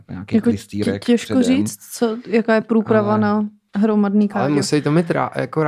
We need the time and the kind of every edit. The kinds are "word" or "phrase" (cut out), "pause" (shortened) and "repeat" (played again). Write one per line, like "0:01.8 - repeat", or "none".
none

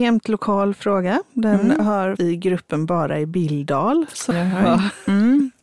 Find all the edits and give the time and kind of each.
0:02.2 - word
0:04.3 - word

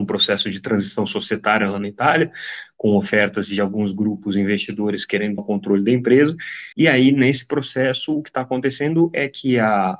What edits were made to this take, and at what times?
0:05.4 - word
0:06.7 - pause

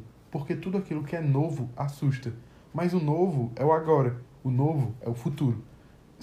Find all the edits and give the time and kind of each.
none

